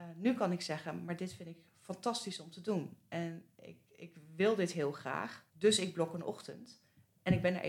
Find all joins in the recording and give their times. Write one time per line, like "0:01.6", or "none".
0:05.5

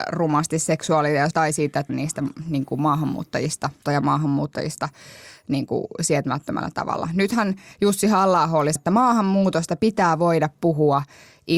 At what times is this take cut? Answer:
0:01.3
0:01.9
0:03.8
0:08.8

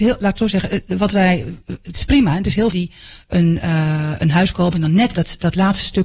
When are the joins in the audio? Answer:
0:02.7
0:04.5
0:05.1

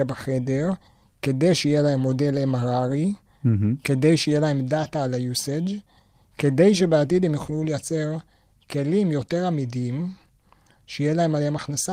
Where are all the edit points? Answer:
none

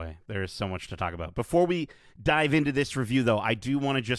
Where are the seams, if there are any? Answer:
none

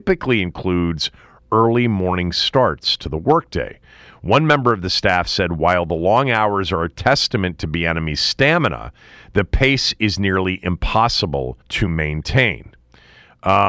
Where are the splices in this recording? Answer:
0:11.6

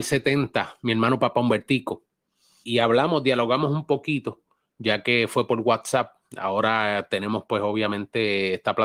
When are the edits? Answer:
0:02.6

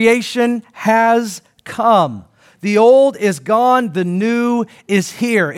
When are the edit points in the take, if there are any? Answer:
none

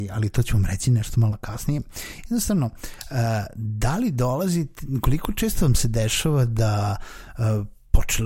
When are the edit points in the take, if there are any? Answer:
none

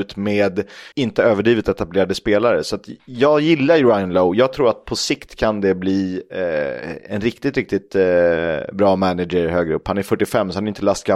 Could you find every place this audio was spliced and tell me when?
0:00.9

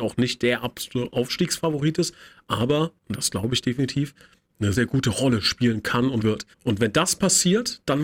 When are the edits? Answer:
0:03.0
0:04.7
0:06.2
0:06.5

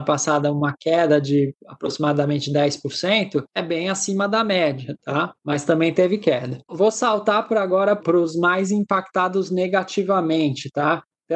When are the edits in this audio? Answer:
0:03.5
0:05.4
0:06.6

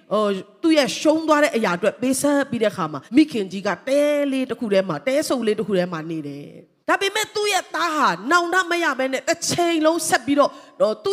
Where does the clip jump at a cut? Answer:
0:03.1
0:06.8

